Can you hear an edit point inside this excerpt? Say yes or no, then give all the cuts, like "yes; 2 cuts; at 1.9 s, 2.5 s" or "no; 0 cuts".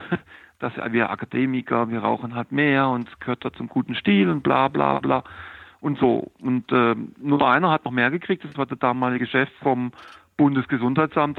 no; 0 cuts